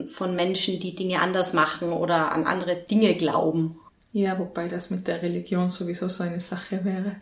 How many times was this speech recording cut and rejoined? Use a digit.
1